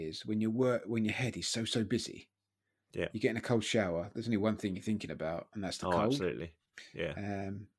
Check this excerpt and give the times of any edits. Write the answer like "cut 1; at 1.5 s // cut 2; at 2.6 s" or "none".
none